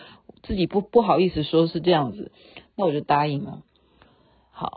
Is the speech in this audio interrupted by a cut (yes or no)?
no